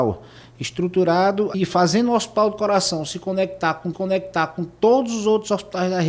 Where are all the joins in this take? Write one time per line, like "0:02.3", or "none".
0:01.5
0:03.9